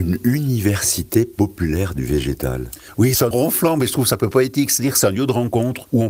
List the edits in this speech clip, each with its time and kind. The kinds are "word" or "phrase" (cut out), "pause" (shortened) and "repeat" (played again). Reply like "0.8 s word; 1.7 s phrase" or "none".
3.3 s word